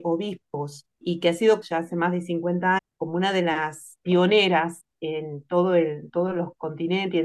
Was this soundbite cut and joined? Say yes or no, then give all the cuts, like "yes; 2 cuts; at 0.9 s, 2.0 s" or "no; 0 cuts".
yes; 4 cuts; at 0.9 s, 1.6 s, 2.8 s, 4.0 s